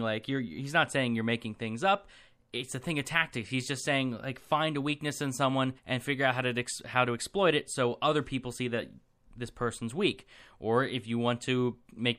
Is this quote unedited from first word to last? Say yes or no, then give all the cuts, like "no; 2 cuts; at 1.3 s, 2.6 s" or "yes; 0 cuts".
no; 1 cut; at 5.8 s